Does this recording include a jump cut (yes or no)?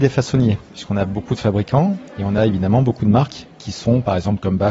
no